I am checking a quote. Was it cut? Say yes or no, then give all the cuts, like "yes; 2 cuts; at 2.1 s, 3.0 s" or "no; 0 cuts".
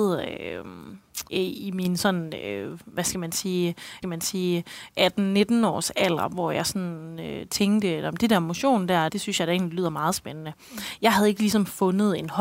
yes; 3 cuts; at 1.3 s, 4.0 s, 9.1 s